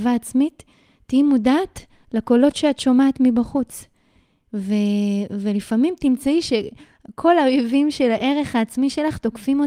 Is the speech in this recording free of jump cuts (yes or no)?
yes